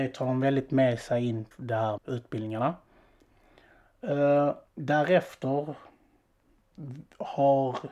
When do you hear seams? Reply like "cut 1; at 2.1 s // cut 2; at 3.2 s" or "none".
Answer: cut 1; at 1.5 s // cut 2; at 2.0 s // cut 3; at 4.7 s